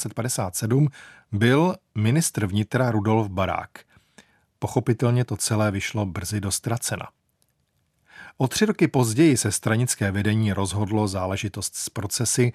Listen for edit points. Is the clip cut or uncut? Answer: uncut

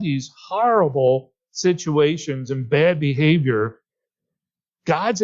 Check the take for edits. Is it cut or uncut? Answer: uncut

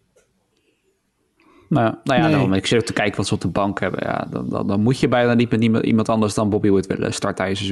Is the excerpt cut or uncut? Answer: uncut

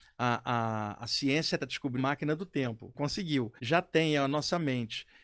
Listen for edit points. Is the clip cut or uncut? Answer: cut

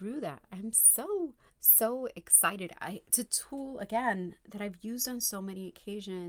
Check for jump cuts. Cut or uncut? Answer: cut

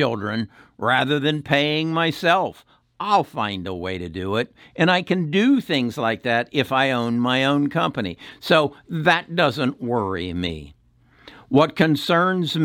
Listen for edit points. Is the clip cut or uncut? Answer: uncut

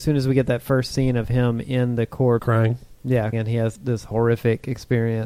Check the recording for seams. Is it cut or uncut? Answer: cut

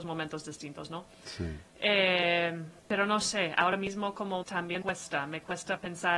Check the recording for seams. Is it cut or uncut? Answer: cut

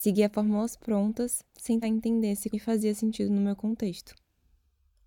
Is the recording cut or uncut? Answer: cut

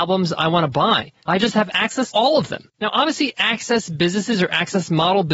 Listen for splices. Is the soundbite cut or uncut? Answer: cut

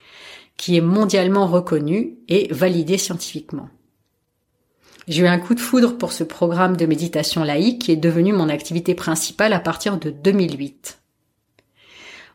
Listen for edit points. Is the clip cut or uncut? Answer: uncut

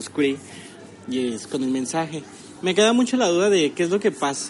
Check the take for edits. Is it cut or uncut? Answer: uncut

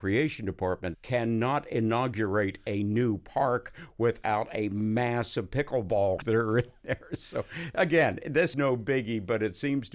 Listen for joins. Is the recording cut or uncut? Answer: cut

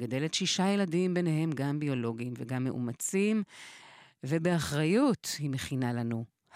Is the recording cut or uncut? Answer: uncut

